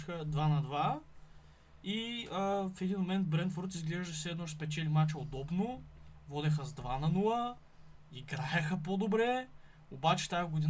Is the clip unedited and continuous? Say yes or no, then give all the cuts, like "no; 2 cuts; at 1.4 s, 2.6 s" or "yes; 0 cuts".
yes; 0 cuts